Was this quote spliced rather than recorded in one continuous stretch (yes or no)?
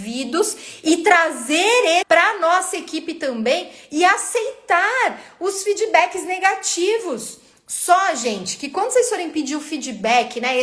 yes